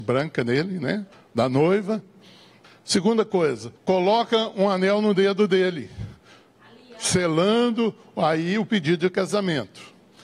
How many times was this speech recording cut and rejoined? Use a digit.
3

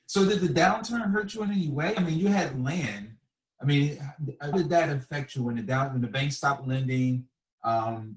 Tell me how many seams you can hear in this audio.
1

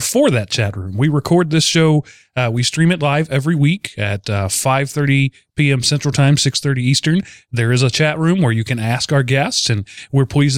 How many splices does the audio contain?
0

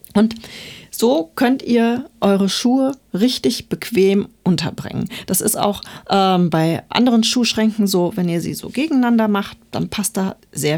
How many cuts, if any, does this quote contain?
0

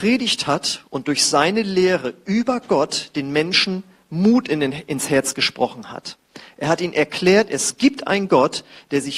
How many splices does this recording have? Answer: 0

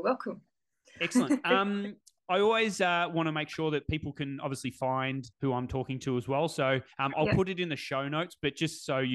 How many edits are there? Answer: 2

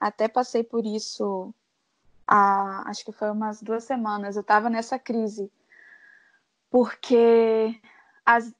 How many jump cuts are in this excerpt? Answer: 0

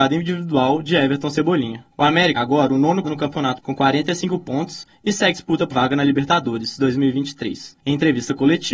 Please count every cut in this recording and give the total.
7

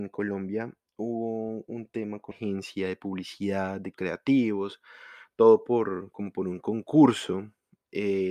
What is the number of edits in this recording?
2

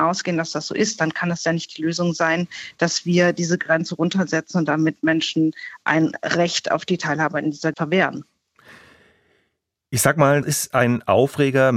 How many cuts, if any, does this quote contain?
2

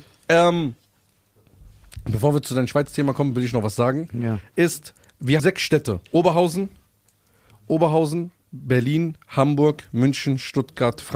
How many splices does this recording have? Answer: 2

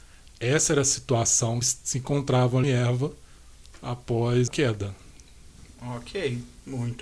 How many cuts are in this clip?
3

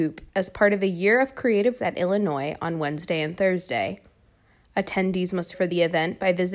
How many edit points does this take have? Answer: 2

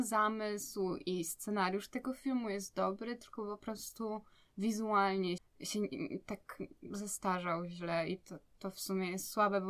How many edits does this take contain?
1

